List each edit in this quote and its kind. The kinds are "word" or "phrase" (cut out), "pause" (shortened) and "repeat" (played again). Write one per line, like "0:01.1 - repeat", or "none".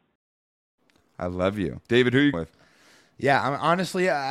0:01.8 - pause
0:02.3 - word